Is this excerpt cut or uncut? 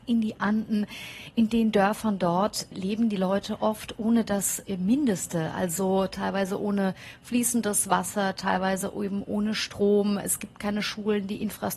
uncut